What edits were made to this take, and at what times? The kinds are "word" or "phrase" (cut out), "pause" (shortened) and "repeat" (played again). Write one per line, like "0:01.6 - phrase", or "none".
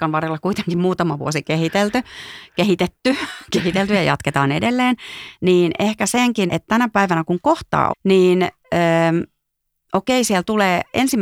0:06.5 - word
0:07.9 - word